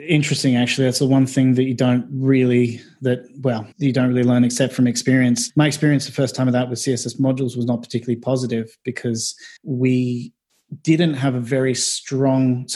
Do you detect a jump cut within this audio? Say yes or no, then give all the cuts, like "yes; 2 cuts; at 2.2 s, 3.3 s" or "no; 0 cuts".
yes; 2 cuts; at 3.7 s, 9.6 s